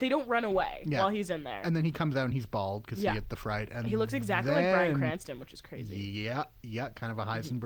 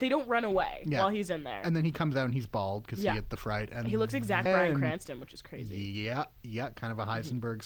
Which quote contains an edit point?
second; 1 cut; at 4.5 s

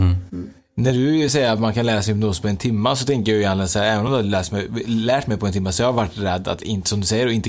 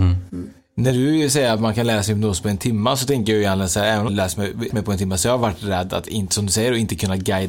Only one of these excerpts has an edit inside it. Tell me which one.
second; 2 cuts; at 4.1 s, 4.7 s

